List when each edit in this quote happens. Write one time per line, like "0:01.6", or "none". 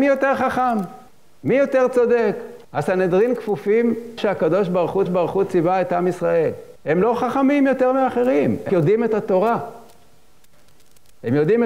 0:01.1
0:02.6
0:04.2
0:05.1
0:06.8
0:08.7